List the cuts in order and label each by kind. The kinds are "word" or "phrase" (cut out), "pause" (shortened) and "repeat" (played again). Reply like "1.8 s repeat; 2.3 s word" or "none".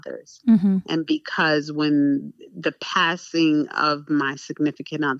none